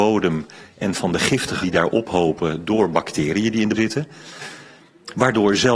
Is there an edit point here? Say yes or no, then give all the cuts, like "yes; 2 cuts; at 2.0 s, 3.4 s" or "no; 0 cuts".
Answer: yes; 2 cuts; at 1.6 s, 3.7 s